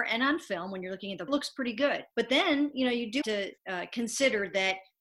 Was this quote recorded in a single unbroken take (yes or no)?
no